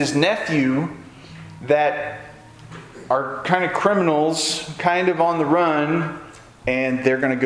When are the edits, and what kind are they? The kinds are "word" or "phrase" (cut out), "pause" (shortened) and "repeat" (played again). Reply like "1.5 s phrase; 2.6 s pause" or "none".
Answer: none